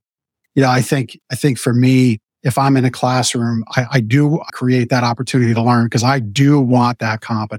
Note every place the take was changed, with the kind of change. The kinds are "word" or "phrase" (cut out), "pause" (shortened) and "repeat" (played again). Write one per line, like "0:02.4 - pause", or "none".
0:01.2 - pause
0:02.2 - pause
0:04.5 - phrase